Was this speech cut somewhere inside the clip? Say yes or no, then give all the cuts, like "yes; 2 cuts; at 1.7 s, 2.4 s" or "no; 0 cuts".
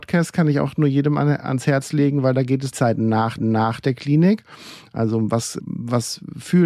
yes; 3 cuts; at 2.7 s, 3.4 s, 5.6 s